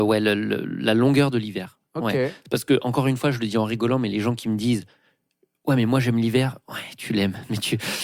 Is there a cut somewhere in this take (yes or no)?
yes